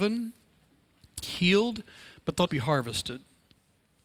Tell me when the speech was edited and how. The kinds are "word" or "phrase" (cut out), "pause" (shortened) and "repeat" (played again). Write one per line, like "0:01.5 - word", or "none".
0:01.2 - word
0:02.5 - word